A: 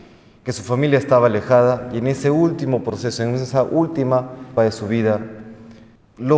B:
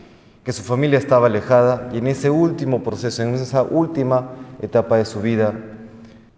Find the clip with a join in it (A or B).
A